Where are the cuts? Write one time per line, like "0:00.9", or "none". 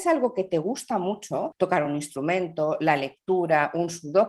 none